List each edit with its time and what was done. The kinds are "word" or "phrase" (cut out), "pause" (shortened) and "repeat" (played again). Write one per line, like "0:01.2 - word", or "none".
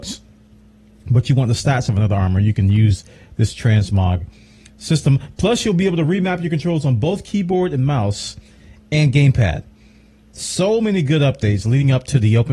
none